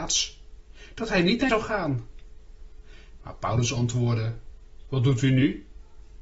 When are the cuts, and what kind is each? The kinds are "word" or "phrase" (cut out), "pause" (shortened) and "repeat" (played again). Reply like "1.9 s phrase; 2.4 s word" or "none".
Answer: 1.5 s word